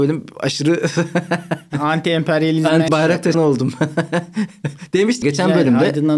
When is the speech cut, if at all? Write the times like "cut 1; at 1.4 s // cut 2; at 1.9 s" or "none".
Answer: cut 1; at 1.7 s // cut 2; at 2.9 s // cut 3; at 3.3 s // cut 4; at 5.2 s